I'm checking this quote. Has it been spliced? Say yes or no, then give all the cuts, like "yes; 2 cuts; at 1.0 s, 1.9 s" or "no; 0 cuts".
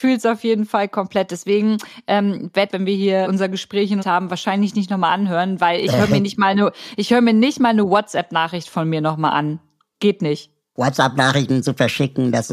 yes; 3 cuts; at 2.7 s, 3.2 s, 4.0 s